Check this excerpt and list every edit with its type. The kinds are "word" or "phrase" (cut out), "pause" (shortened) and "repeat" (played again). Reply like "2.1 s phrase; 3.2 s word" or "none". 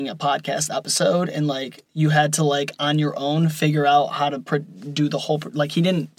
1.9 s pause

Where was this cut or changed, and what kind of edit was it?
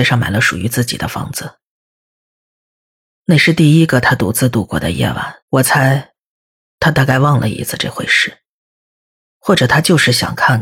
5.4 s pause

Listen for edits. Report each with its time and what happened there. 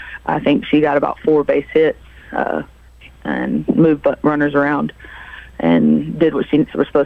none

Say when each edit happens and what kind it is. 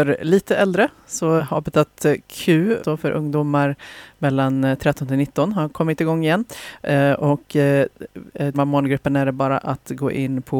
1.4 s word; 2.8 s word; 8.5 s word

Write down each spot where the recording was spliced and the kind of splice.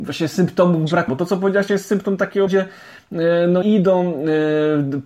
1.1 s word; 1.7 s word; 2.5 s phrase; 3.6 s word

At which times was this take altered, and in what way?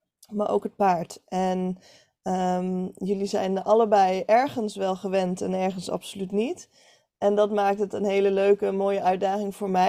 none

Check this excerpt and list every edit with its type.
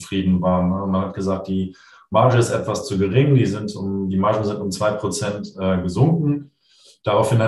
none

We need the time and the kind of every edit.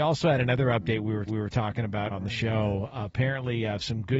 1.3 s repeat; 2.1 s word

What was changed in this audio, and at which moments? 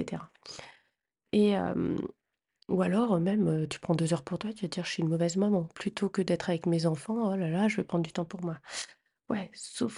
none

